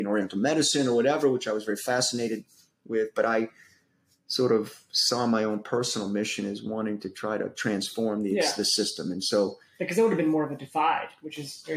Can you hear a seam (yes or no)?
no